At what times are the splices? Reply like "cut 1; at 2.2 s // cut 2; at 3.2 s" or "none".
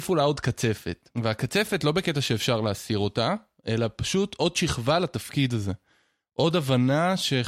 cut 1; at 1.1 s